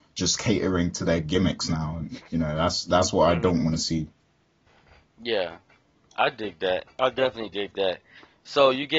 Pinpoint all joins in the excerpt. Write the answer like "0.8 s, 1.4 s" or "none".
none